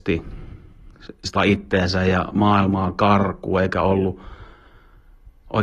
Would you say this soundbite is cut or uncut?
cut